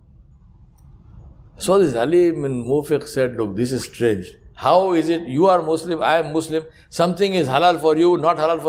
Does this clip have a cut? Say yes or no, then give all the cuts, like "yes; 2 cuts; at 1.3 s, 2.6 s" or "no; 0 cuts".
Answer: no; 0 cuts